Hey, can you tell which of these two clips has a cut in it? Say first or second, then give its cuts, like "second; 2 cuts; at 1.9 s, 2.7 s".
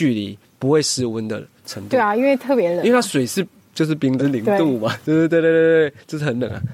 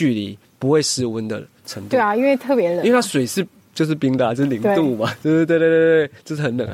first; 1 cut; at 4.2 s